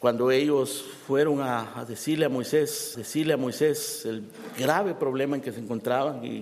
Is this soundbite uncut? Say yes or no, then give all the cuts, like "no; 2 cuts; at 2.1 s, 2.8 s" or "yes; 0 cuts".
no; 1 cut; at 2.9 s